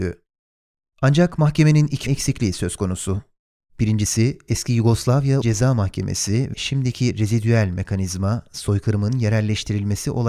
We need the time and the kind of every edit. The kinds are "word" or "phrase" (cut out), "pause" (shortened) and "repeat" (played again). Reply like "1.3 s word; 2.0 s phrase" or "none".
2.1 s word; 5.4 s word; 6.5 s word